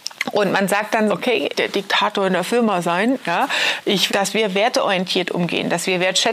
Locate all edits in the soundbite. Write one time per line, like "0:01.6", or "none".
0:01.1
0:01.5
0:04.1